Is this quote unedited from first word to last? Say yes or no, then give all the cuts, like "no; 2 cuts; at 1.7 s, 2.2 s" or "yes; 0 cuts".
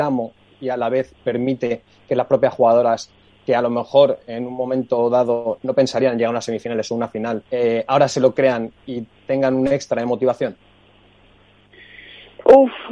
no; 2 cuts; at 5.6 s, 7.5 s